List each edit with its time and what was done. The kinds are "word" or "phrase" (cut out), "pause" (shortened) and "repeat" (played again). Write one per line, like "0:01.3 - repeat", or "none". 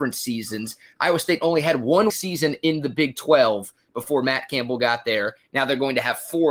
0:02.1 - word

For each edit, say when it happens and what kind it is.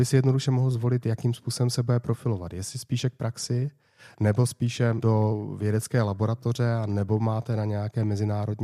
none

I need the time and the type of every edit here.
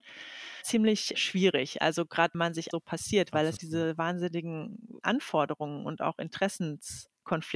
0:01.1 - word
0:02.3 - word
0:02.7 - phrase
0:03.6 - word
0:05.0 - word

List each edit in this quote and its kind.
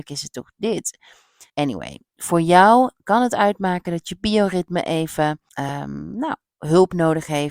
0:01.5 - pause
0:05.5 - pause

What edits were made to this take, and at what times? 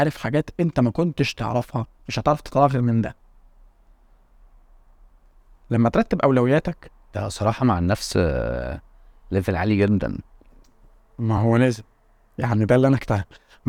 none

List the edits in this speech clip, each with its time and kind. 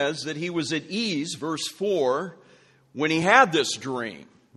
none

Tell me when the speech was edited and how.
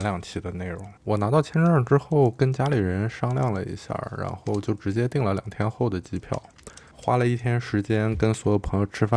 0:01.0 - pause

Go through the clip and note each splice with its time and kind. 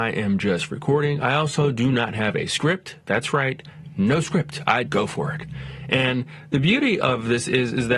0:04.8 - word

